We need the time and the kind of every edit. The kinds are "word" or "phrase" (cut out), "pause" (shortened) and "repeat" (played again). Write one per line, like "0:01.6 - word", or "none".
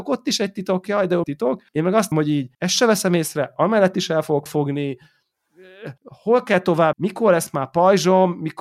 0:01.2 - word
0:01.7 - pause
0:02.1 - word
0:02.5 - pause
0:04.5 - phrase
0:06.0 - pause
0:06.9 - word